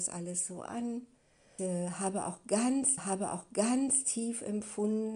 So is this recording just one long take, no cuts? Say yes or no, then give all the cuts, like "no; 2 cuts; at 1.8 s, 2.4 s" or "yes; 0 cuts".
no; 2 cuts; at 1.6 s, 3.0 s